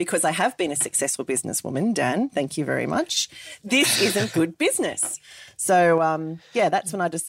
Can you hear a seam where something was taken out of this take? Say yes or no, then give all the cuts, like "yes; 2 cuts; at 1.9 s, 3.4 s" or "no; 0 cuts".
no; 0 cuts